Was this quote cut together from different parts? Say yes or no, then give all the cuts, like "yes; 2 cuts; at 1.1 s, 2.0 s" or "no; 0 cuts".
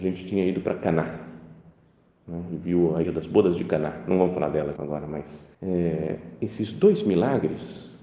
yes; 3 cuts; at 3.0 s, 4.8 s, 5.5 s